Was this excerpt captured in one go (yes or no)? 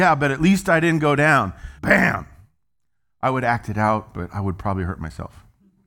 no